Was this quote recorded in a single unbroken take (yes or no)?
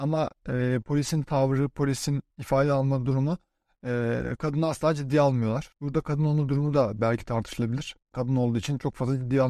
no